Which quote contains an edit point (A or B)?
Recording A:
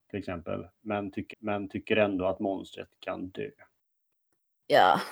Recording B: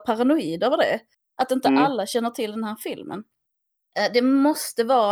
A